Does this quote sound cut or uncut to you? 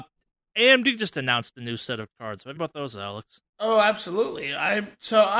cut